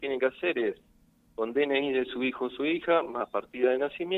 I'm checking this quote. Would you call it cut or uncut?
uncut